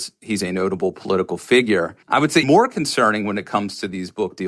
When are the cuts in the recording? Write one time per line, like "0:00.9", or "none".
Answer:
0:02.0
0:02.4